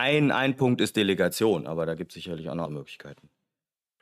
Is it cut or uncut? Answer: cut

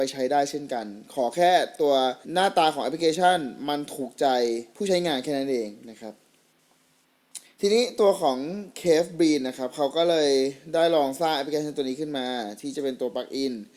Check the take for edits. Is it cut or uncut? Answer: cut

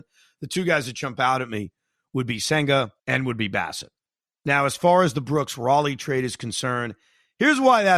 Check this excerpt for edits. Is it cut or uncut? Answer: cut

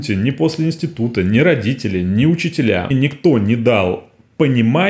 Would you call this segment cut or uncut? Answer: cut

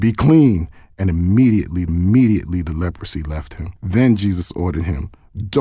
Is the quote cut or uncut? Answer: cut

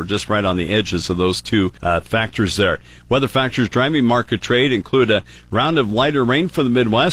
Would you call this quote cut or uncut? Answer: cut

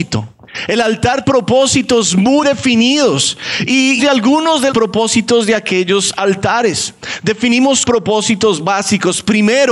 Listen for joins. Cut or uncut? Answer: cut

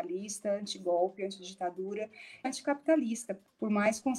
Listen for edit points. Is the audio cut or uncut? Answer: cut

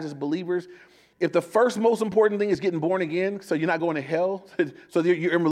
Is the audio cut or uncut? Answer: uncut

